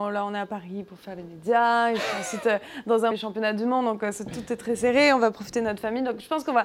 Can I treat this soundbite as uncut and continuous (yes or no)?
no